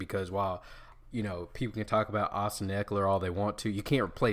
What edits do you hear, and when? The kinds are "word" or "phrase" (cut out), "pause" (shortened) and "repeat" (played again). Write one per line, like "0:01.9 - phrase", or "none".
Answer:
none